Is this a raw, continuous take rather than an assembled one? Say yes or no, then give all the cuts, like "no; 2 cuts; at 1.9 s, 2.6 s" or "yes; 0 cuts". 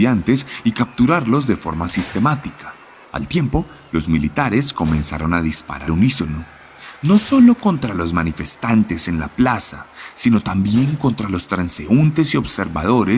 no; 2 cuts; at 3.0 s, 5.9 s